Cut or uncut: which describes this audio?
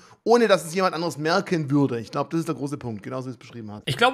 uncut